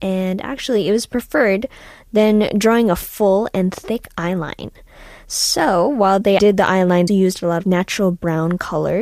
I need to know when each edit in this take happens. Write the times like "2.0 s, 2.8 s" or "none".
6.4 s, 7.1 s, 7.6 s